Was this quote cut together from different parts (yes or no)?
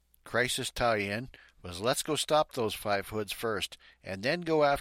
no